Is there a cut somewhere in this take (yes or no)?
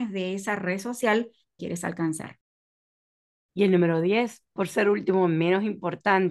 yes